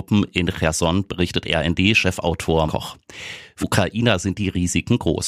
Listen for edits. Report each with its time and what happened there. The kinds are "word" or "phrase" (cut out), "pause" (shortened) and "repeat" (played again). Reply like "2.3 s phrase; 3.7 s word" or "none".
2.7 s word; 3.6 s word